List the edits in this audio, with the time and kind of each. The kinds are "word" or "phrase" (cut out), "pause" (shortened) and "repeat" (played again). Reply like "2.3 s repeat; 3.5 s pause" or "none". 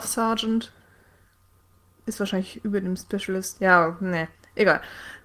none

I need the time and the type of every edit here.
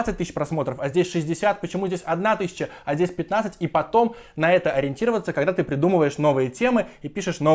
none

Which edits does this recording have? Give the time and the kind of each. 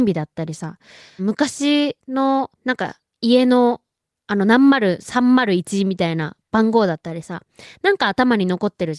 1.2 s phrase; 2.5 s pause

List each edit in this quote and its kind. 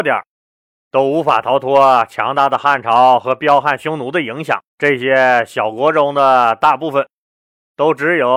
4.7 s pause

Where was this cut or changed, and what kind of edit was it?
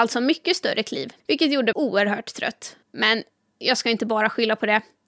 1.2 s pause; 1.7 s word; 2.8 s pause

